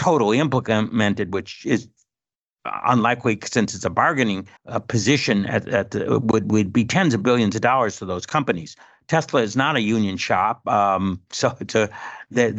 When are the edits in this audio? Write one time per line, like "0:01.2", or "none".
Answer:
0:04.6